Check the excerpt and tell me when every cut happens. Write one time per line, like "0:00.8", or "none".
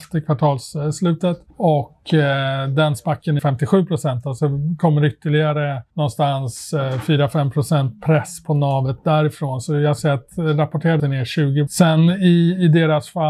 0:01.5
0:03.4
0:05.9
0:10.0
0:11.0
0:11.7